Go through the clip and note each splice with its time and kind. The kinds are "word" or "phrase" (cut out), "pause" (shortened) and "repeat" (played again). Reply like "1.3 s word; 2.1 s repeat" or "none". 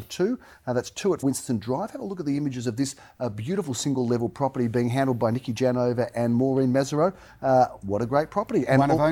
1.2 s word